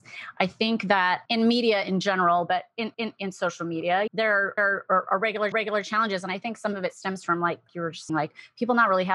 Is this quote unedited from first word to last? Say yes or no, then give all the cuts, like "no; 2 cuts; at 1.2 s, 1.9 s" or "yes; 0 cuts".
no; 6 cuts; at 2.9 s, 4.1 s, 4.6 s, 5.5 s, 7.7 s, 8.1 s